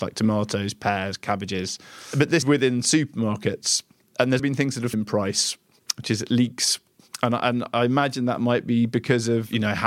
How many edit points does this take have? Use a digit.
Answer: 4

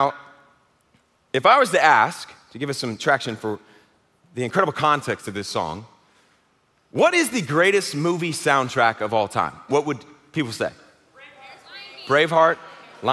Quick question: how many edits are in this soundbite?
0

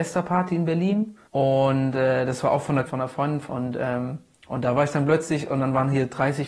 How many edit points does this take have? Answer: 3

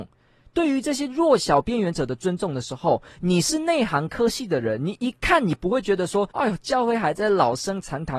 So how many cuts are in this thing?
1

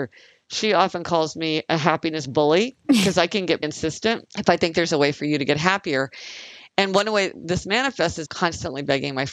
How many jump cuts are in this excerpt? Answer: 2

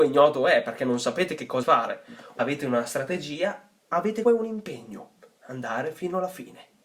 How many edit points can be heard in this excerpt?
3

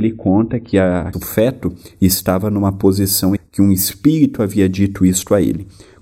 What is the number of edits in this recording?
2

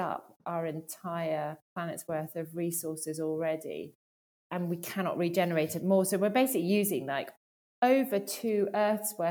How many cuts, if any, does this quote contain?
1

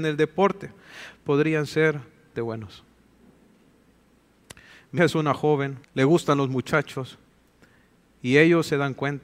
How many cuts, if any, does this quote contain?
3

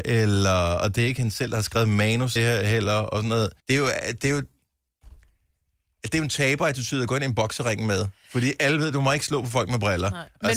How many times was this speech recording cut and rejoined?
2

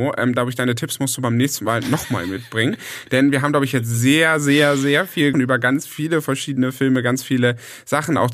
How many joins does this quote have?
1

